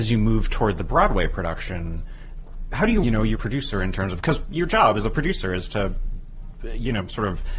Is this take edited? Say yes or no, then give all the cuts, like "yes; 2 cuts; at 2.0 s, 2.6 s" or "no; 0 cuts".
yes; 2 cuts; at 3.0 s, 3.3 s